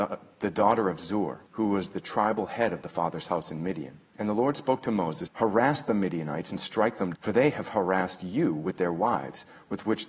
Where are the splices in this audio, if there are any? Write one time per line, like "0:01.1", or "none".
0:01.5
0:04.0
0:05.3
0:07.1